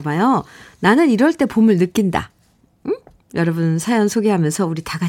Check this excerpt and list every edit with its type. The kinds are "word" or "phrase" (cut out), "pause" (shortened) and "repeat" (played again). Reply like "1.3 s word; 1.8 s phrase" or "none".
none